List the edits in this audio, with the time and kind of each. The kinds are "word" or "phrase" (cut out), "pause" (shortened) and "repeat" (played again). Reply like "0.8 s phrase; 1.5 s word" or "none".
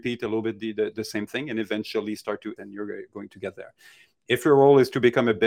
2.6 s word